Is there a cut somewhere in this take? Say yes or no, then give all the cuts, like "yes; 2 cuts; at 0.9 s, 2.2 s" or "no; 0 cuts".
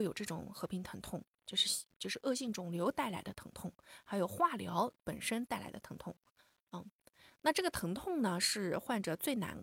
no; 0 cuts